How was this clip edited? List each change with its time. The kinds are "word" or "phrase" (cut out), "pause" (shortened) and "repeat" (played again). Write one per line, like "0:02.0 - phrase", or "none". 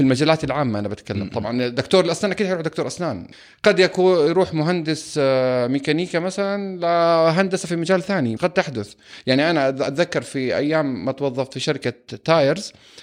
0:08.4 - word